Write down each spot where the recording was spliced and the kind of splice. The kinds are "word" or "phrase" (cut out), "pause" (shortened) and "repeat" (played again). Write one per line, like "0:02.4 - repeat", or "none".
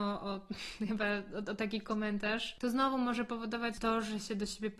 none